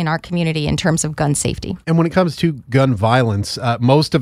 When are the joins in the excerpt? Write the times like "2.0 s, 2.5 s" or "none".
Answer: 1.8 s